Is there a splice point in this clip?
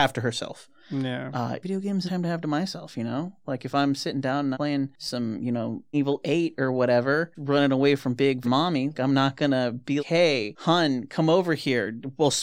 yes; 8 cuts; at 1.6 s, 2.1 s, 4.5 s, 5.9 s, 7.3 s, 8.4 s, 8.9 s, 10.0 s

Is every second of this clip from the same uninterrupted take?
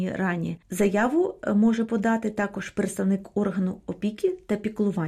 yes; 0 cuts

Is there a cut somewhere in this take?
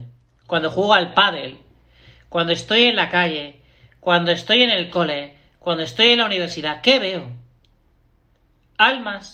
no; 0 cuts

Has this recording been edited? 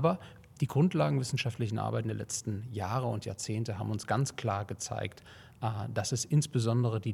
no; 0 cuts

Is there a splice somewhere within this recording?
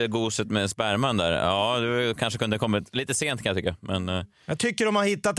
no; 0 cuts

